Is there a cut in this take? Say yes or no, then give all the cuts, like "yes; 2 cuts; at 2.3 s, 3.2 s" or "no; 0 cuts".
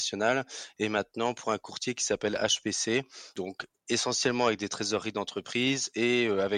no; 0 cuts